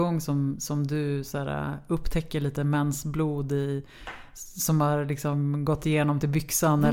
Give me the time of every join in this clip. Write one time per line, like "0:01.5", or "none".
none

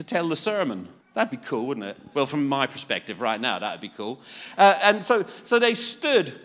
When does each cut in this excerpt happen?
0:01.0

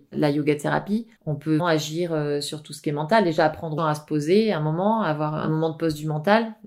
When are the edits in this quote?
0:01.2
0:01.6
0:03.8

